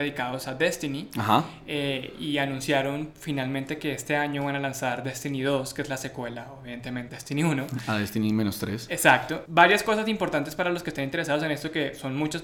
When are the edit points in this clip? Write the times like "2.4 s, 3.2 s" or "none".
7.1 s